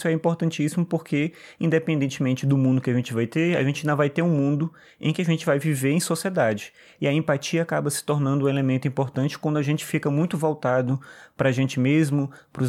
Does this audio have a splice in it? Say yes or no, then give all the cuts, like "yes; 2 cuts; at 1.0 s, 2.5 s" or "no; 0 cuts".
no; 0 cuts